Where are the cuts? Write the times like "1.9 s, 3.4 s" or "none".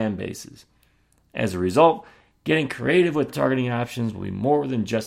3.3 s